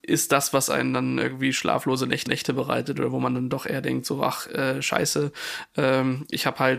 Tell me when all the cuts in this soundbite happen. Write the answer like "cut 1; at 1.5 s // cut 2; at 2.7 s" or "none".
cut 1; at 2.3 s